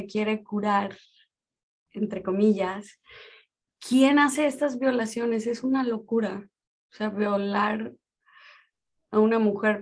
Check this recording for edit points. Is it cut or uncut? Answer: uncut